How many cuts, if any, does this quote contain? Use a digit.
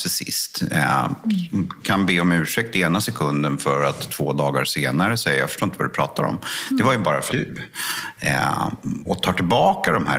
2